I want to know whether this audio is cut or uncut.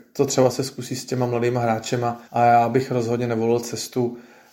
cut